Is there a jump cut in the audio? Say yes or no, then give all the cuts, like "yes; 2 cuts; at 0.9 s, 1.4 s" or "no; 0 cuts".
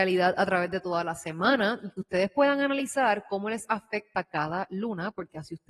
no; 0 cuts